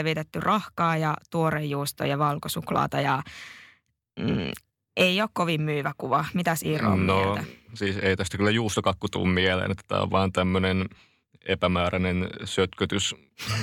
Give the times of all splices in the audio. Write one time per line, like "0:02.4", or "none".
none